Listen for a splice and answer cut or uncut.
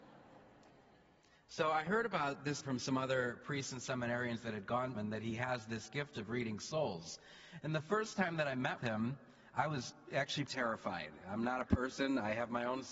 cut